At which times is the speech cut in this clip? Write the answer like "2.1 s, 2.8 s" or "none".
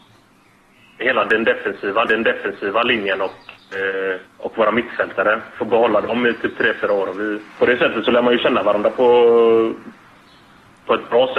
2.1 s, 4.3 s, 7.5 s